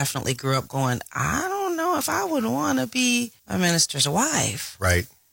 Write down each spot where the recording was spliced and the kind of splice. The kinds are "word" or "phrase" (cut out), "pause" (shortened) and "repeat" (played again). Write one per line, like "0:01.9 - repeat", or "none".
0:03.4 - pause

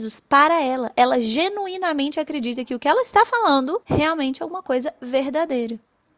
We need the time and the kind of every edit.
0:03.8 - pause

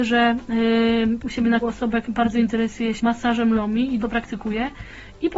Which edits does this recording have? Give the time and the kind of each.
0:01.2 - word
0:01.6 - word
0:02.0 - word
0:03.0 - word
0:03.5 - word
0:04.0 - word

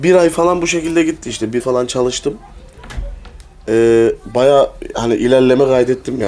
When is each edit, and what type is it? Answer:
0:01.6 - word

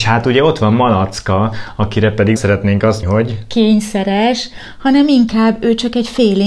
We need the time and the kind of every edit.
0:02.4 - word
0:03.0 - word

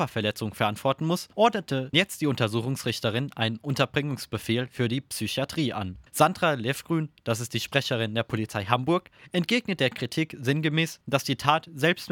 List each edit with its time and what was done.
0:01.9 - word

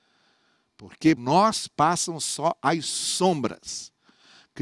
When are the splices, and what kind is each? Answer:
0:01.2 - word

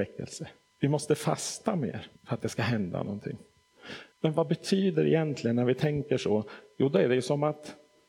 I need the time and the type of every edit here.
0:02.2 - pause
0:04.1 - pause

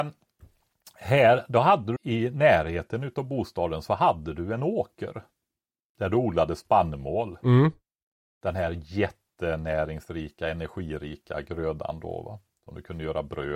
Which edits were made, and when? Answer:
0:02.0 - phrase

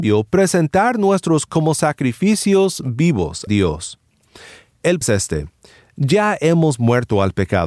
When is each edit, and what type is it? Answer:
0:01.5 - word
0:03.5 - word
0:05.0 - word

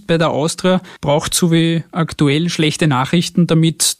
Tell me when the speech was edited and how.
none

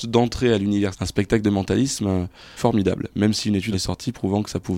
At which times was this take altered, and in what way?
0:00.9 - word
0:02.6 - word
0:03.7 - word

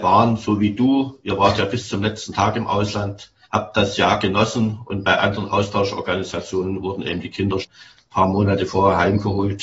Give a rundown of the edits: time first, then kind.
0:03.4 - pause
0:07.6 - word

